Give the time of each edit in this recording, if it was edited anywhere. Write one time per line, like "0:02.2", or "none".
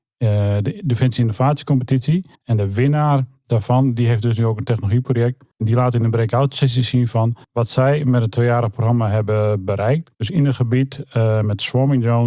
0:02.3
0:05.5
0:07.4
0:10.1